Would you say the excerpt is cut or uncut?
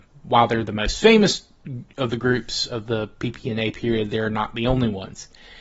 uncut